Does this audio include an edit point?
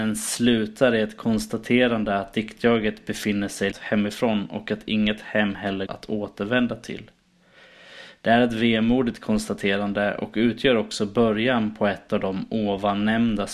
yes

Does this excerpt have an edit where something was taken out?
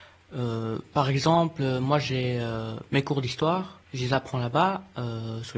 yes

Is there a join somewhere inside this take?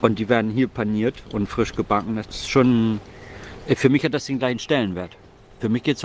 yes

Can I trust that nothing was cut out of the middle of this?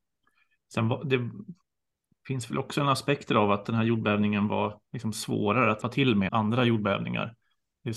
no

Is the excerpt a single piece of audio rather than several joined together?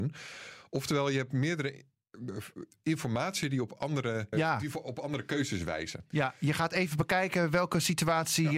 no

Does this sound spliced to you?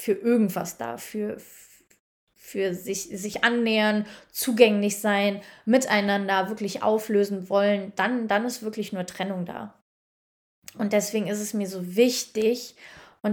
no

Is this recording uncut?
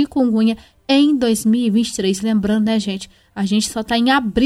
yes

